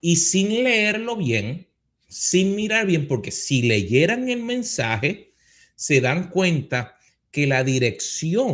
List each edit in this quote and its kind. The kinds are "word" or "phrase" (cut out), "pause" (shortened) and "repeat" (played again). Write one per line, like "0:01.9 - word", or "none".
none